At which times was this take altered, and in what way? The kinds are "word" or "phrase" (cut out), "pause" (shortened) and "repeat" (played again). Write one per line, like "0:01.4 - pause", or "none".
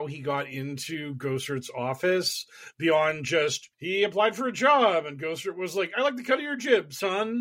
0:03.7 - pause